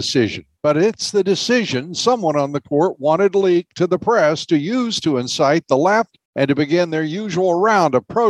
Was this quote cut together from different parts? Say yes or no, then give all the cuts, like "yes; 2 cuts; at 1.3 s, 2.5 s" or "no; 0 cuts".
yes; 1 cut; at 6.3 s